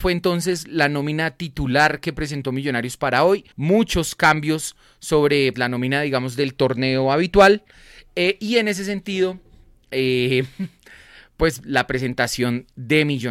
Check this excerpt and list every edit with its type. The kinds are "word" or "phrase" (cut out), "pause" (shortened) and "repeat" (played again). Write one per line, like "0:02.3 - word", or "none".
0:03.5 - pause
0:05.5 - word